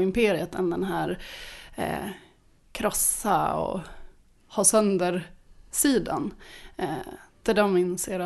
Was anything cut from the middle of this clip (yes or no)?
no